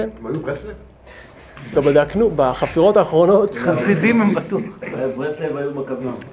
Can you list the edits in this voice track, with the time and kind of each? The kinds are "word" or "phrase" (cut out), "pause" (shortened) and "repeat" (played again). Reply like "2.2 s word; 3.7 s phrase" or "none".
1.7 s phrase